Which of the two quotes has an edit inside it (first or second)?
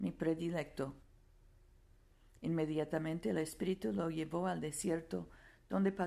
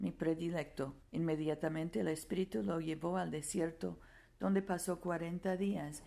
second